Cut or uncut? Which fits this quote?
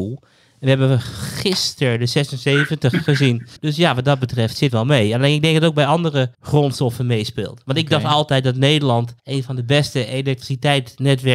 cut